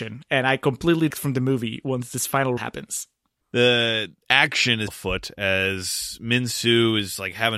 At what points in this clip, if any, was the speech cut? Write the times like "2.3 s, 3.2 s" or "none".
1.1 s, 2.6 s, 4.2 s, 4.9 s